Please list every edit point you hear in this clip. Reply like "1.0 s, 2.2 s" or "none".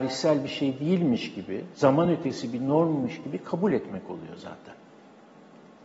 none